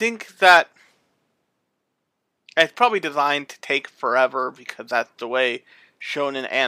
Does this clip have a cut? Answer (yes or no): no